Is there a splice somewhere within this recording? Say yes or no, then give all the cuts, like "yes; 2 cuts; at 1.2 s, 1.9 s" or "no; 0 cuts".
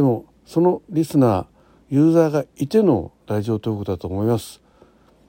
no; 0 cuts